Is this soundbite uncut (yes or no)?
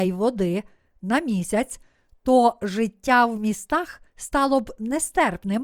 no